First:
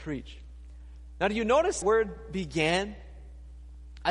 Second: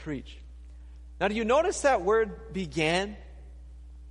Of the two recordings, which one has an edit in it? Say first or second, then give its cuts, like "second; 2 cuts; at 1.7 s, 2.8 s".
first; 1 cut; at 1.8 s